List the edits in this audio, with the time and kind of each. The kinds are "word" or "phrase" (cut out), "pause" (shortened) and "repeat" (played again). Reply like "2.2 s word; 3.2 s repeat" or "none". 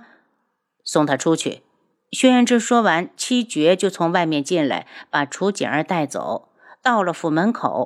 none